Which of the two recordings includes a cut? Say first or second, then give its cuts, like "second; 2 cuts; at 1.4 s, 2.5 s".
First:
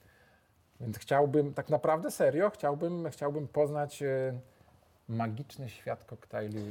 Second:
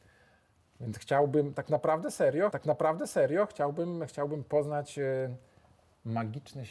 second; 1 cut; at 2.5 s